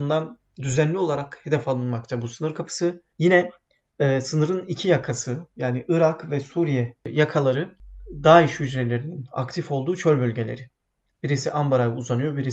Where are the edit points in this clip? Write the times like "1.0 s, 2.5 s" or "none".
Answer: 3.1 s